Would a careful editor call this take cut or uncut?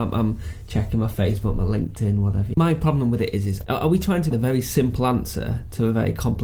cut